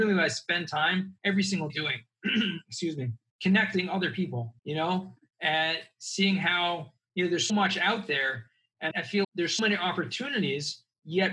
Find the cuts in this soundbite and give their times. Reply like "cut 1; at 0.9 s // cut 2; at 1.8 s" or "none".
cut 1; at 1.2 s // cut 2; at 1.7 s // cut 3; at 3.3 s // cut 4; at 4.6 s // cut 5; at 7.5 s // cut 6; at 8.9 s // cut 7; at 9.2 s // cut 8; at 9.6 s